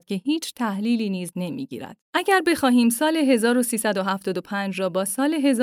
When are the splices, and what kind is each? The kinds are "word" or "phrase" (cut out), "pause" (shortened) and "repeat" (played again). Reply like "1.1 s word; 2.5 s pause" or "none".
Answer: 1.3 s phrase; 2.0 s pause